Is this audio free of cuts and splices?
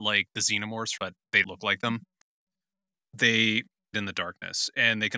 no; 3 cuts; at 1.0 s, 1.4 s, 3.9 s

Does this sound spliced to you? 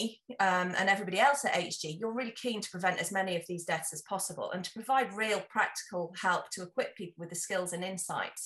no; 0 cuts

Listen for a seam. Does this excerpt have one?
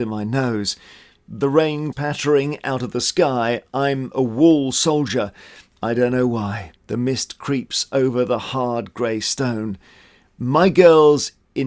yes; 2 cuts; at 1.9 s, 6.8 s

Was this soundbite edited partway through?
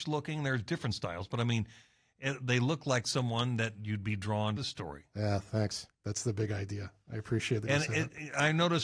yes; 2 cuts; at 4.6 s, 5.9 s

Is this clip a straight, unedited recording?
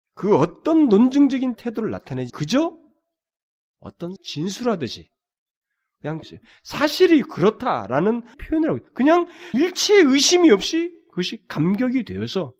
no; 6 cuts; at 1.6 s, 2.3 s, 4.2 s, 6.2 s, 8.3 s, 9.5 s

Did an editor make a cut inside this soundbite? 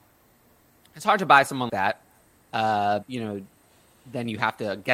yes; 2 cuts; at 1.7 s, 3.0 s

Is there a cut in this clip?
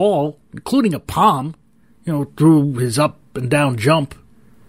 no; 0 cuts

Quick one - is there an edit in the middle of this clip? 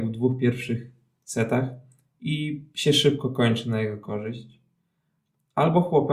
no; 0 cuts

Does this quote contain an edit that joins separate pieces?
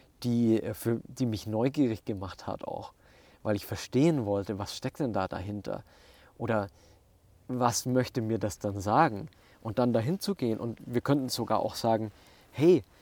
no; 0 cuts

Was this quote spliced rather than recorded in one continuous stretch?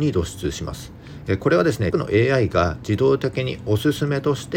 yes; 1 cut; at 1.9 s

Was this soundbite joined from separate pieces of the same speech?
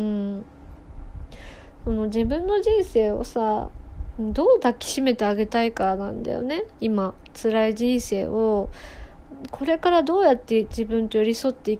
yes; 1 cut; at 6.7 s

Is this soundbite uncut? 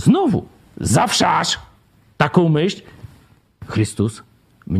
yes; 0 cuts

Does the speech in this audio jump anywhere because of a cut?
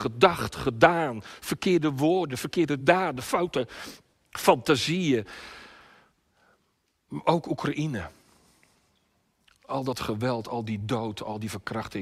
no; 0 cuts

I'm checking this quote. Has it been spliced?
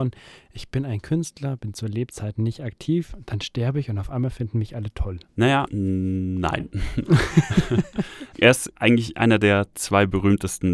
yes; 1 cut; at 5.3 s

